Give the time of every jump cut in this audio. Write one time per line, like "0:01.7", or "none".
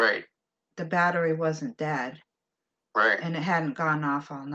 none